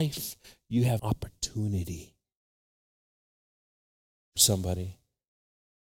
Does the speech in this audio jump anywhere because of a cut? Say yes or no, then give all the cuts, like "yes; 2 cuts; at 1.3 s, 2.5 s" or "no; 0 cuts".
yes; 2 cuts; at 1.0 s, 4.4 s